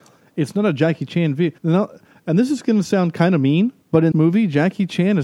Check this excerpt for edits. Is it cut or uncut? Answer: cut